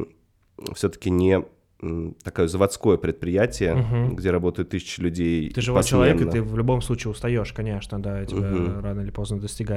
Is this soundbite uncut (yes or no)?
yes